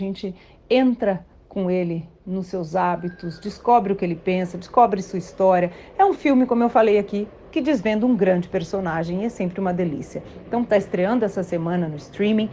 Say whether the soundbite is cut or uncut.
uncut